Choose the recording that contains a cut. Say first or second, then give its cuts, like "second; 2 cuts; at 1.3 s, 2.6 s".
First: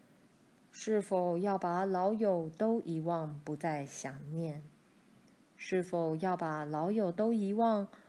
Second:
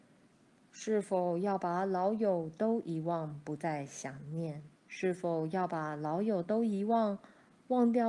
second; 1 cut; at 4.8 s